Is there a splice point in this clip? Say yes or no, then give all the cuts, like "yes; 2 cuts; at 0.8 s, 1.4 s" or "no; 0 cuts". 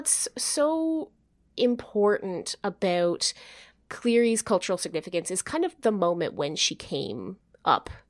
no; 0 cuts